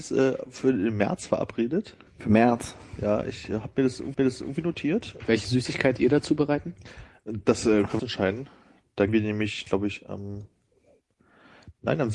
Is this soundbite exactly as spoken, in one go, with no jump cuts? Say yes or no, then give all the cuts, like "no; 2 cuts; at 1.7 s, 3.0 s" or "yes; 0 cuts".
no; 5 cuts; at 2.1 s, 4.1 s, 6.0 s, 8.0 s, 9.1 s